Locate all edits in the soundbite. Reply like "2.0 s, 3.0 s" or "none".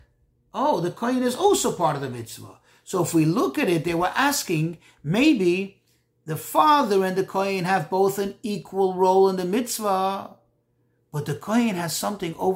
none